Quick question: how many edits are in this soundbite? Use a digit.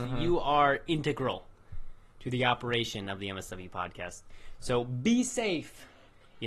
0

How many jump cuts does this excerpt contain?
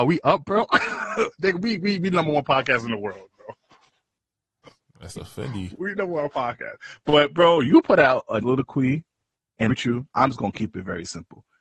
2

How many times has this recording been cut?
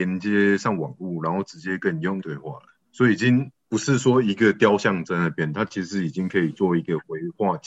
1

